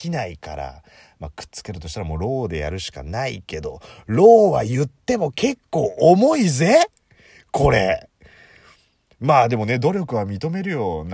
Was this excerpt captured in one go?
yes; 0 cuts

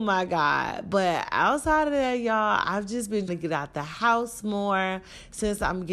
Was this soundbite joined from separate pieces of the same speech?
yes; 1 cut; at 3.3 s

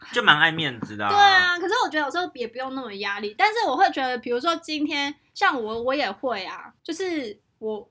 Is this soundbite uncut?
no; 1 cut; at 6.8 s

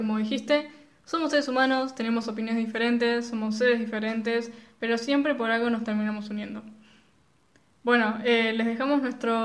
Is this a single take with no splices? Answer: yes; 0 cuts

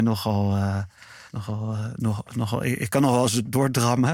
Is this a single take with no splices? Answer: no; 1 cut; at 1.3 s

